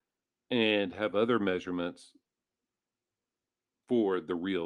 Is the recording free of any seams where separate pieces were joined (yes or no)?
yes